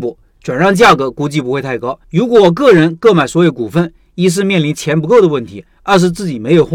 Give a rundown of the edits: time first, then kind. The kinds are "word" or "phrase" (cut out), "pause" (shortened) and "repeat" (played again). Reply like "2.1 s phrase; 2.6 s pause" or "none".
2.0 s pause